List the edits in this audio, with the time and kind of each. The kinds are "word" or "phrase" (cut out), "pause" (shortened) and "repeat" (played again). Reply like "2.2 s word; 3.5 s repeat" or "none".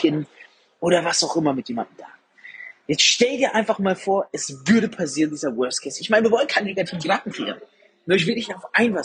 none

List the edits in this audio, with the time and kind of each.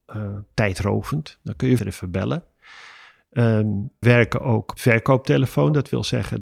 1.8 s phrase; 4.0 s word; 4.8 s phrase

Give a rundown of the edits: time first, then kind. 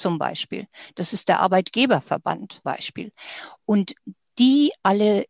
2.6 s word

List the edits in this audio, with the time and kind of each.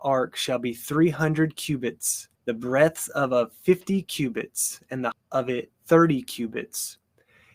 2.3 s pause; 5.1 s word

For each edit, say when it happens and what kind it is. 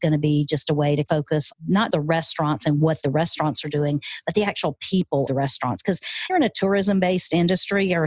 1.5 s word; 1.9 s word; 5.3 s word; 6.3 s phrase

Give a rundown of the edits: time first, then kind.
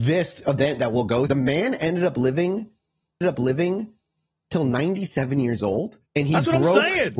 1.3 s word; 3.2 s repeat; 6.1 s pause

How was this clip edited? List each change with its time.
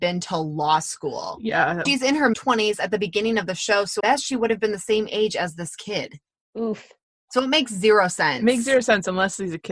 1.9 s word; 2.3 s word; 4.0 s word

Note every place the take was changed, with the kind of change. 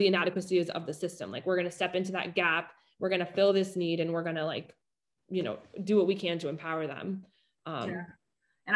none

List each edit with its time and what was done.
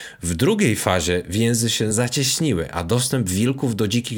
none

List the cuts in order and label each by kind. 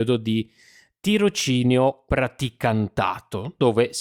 2.1 s word

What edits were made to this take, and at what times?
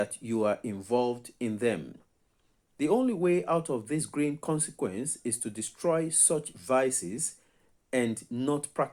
none

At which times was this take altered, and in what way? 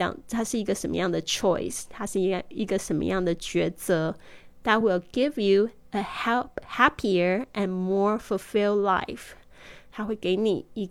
none

